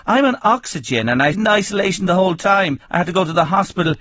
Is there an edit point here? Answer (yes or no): yes